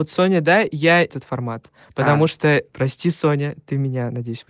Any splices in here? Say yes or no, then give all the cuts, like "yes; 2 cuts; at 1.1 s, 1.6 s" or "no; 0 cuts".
yes; 2 cuts; at 1.1 s, 2.7 s